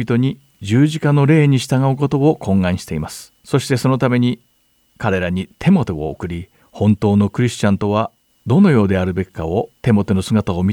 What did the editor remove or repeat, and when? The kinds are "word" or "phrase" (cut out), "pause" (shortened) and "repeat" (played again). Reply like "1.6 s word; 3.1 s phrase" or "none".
3.4 s pause; 6.6 s pause; 9.8 s pause